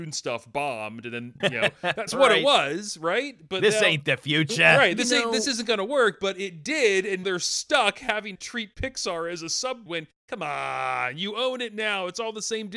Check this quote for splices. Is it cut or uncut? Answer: cut